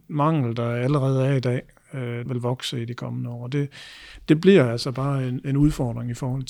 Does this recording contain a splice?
yes; 1 cut; at 2.3 s

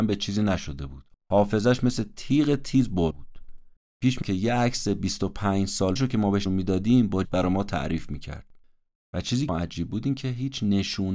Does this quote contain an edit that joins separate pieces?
yes; 6 cuts; at 3.1 s, 4.2 s, 6.0 s, 6.5 s, 7.2 s, 9.5 s

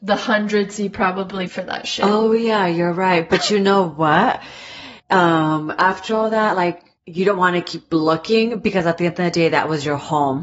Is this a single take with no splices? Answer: no; 3 cuts; at 1.5 s, 5.0 s, 7.0 s

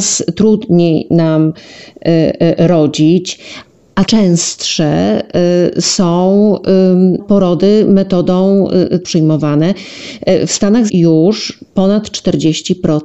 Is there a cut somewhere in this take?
yes; 4 cuts; at 4.1 s, 7.2 s, 9.0 s, 10.9 s

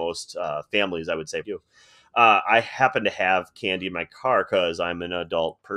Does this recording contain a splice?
yes; 1 cut; at 1.4 s

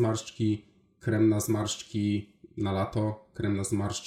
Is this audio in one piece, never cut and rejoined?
yes; 0 cuts

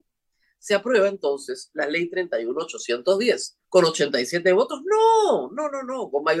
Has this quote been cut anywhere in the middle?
yes; 1 cut; at 3.6 s

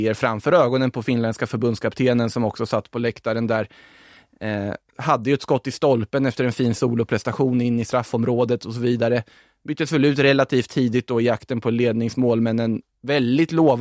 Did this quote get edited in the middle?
no; 0 cuts

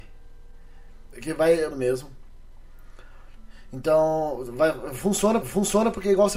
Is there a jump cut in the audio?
yes; 3 cuts; at 1.1 s, 1.7 s, 5.4 s

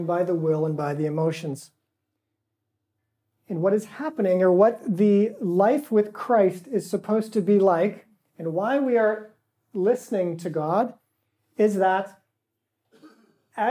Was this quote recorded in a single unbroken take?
yes; 0 cuts

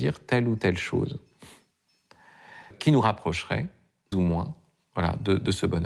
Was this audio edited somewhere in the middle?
yes; 2 cuts; at 2.7 s, 4.1 s

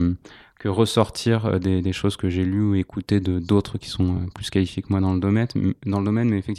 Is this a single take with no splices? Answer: yes; 0 cuts

